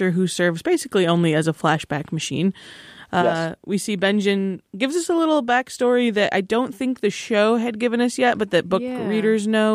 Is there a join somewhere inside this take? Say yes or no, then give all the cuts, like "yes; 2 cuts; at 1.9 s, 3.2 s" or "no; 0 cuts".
no; 0 cuts